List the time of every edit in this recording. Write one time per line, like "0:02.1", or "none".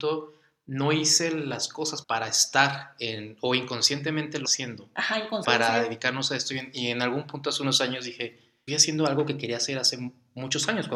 0:02.0
0:04.4
0:05.4
0:08.7